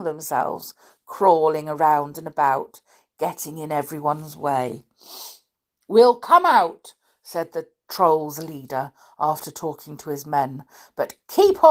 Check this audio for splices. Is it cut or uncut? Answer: uncut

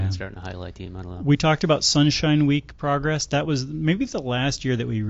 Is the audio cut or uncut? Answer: cut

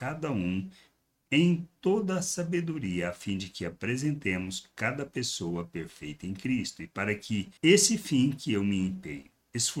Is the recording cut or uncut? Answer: cut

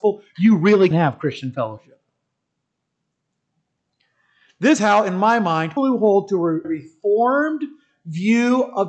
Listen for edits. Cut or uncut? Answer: cut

